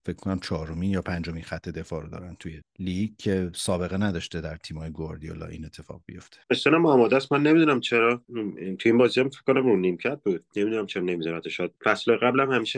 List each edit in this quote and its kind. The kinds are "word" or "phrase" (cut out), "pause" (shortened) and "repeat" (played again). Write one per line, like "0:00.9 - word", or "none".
0:06.4 - pause